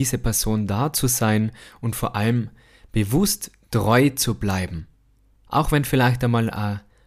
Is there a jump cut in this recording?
no; 0 cuts

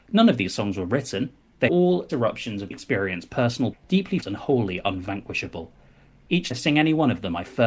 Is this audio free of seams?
no; 6 cuts; at 1.7 s, 2.1 s, 2.7 s, 3.7 s, 4.2 s, 6.5 s

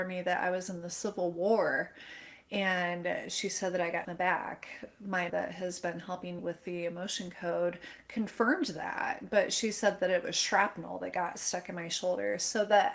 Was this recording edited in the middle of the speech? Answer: yes; 3 cuts; at 4.0 s, 5.3 s, 6.4 s

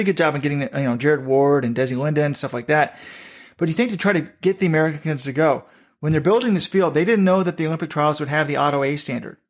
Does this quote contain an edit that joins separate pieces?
no; 0 cuts

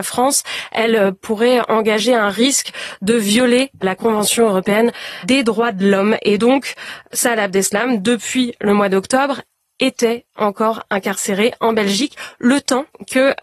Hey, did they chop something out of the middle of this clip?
no; 0 cuts

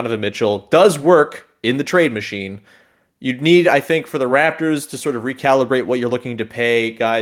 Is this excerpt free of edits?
yes; 0 cuts

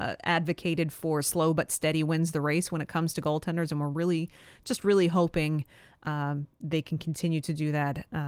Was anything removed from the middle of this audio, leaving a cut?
no; 0 cuts

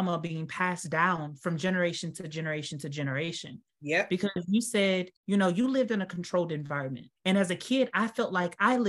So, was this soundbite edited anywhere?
yes; 2 cuts; at 5.2 s, 7.2 s

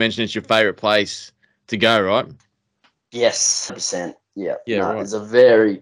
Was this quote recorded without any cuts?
no; 1 cut; at 3.7 s

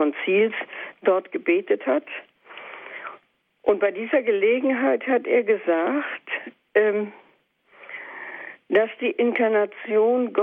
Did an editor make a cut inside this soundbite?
no; 0 cuts

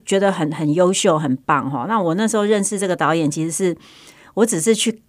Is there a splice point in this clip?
no; 0 cuts

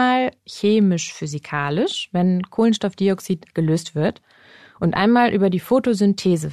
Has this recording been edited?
no; 0 cuts

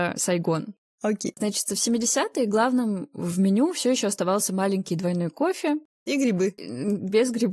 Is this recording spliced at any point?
no; 0 cuts

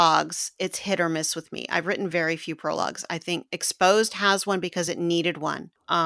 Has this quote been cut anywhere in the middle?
no; 0 cuts

